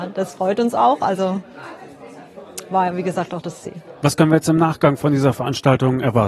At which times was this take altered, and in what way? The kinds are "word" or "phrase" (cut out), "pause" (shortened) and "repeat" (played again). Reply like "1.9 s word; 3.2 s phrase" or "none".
none